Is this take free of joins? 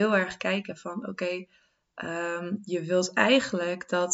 yes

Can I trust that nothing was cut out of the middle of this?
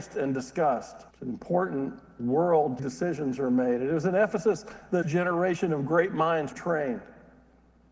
no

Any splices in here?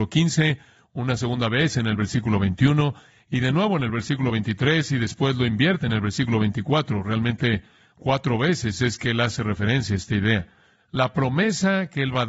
no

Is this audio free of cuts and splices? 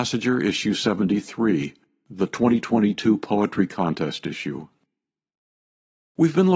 yes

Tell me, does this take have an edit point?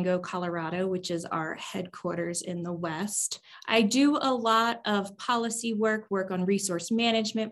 yes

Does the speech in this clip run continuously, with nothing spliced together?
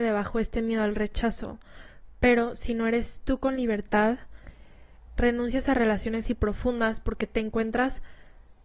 no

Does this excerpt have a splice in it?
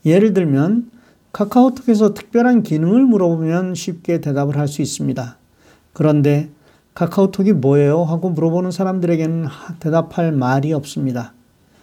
no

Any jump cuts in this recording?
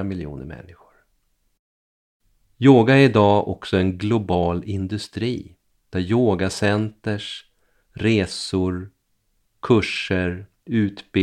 no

